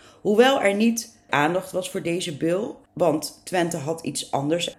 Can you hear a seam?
yes; 1 cut; at 1.3 s

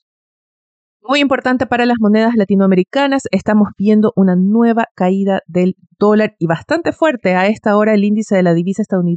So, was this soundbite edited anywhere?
no; 0 cuts

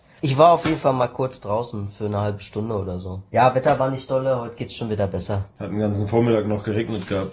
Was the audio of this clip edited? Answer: yes; 2 cuts; at 3.3 s, 5.5 s

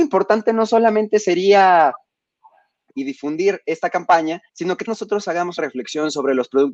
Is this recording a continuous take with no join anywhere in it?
no; 4 cuts; at 2.9 s, 4.5 s, 4.9 s, 5.6 s

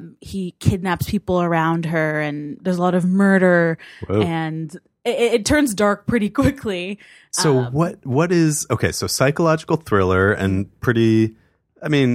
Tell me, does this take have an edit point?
no; 0 cuts

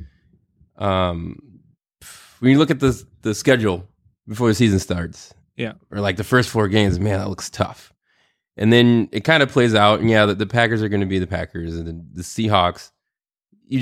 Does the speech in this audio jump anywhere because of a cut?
no; 0 cuts

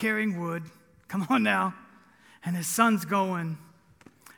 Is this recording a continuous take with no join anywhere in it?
yes; 0 cuts

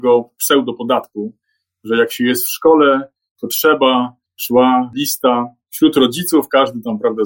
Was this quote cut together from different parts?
no; 0 cuts

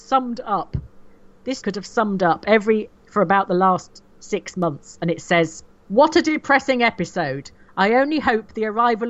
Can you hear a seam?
yes; 2 cuts; at 1.6 s, 2.9 s

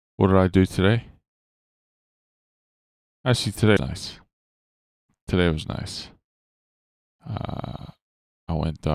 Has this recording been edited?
yes; 1 cut; at 3.8 s

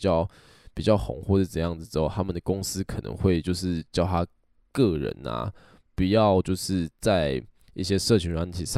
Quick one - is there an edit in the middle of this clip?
no; 0 cuts

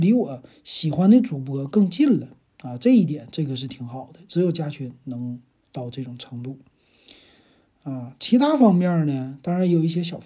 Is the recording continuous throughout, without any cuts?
yes; 0 cuts

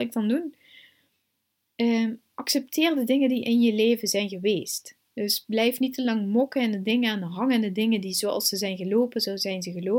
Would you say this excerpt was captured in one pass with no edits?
yes; 0 cuts

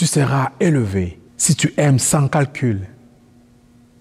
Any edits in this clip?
yes; 1 cut; at 1.3 s

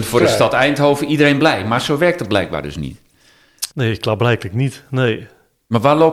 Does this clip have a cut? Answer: yes; 1 cut; at 3.7 s

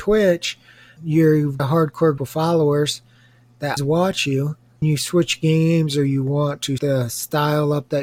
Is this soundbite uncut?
no; 6 cuts; at 1.0 s, 1.6 s, 2.2 s, 3.8 s, 4.8 s, 6.8 s

